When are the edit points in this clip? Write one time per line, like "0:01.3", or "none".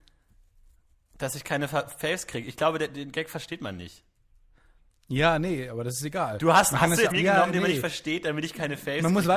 0:07.1